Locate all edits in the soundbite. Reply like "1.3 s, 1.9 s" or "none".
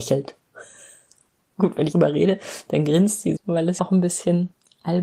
1.9 s, 3.4 s, 3.8 s